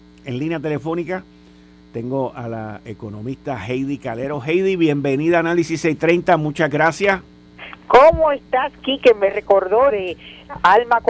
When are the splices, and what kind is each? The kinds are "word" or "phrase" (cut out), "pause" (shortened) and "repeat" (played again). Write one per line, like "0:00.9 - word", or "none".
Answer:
0:09.9 - word